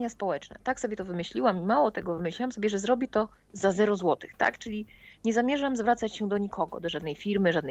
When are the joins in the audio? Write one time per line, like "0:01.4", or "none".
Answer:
none